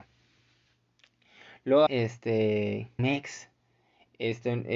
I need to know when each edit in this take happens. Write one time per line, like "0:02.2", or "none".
0:01.9
0:03.0